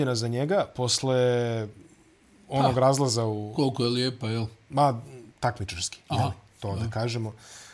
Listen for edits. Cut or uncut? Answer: uncut